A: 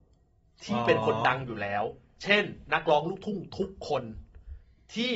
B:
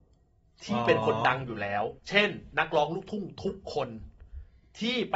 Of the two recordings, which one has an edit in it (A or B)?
B